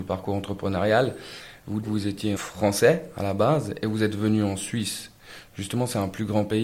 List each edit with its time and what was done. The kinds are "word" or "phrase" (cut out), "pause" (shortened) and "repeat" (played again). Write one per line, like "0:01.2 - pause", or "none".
0:01.8 - word
0:02.4 - word